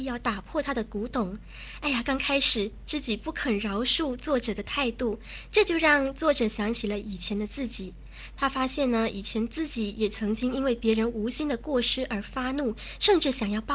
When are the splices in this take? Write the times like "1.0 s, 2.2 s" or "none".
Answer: none